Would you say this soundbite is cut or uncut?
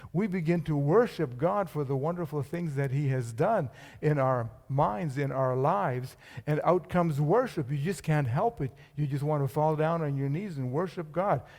uncut